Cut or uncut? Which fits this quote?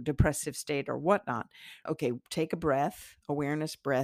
cut